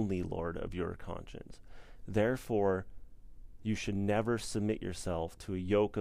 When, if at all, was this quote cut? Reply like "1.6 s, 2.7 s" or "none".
none